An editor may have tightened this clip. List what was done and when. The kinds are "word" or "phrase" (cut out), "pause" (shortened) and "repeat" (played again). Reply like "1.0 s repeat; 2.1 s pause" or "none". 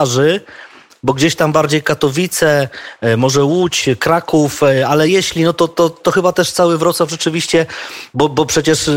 none